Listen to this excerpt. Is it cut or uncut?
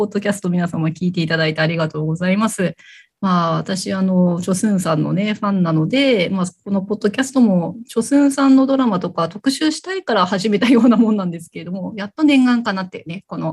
uncut